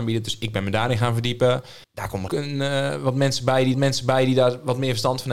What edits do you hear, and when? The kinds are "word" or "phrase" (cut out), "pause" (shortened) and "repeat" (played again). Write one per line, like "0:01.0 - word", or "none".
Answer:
0:01.8 - pause
0:02.3 - phrase
0:03.7 - repeat